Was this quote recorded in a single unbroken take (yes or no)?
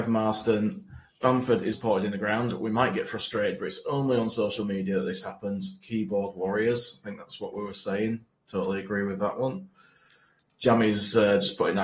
no